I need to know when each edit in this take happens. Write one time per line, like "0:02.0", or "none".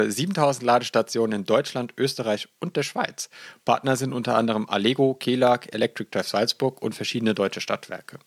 none